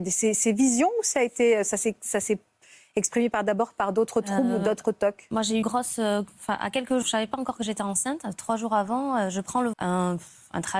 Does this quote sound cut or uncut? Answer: cut